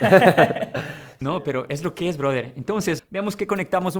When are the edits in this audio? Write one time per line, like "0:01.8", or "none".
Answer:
0:03.0